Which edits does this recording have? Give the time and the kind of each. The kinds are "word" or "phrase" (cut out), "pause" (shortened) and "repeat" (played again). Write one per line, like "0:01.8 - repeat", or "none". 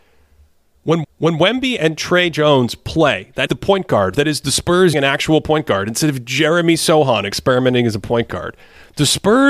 0:01.0 - repeat
0:03.5 - word
0:04.9 - word